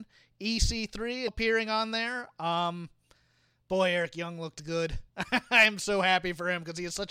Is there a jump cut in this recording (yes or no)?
yes